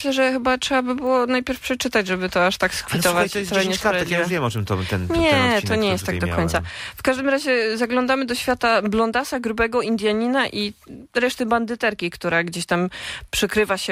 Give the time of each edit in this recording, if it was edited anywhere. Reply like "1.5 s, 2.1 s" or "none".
none